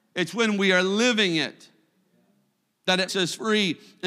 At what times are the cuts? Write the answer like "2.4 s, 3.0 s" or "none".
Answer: 3.1 s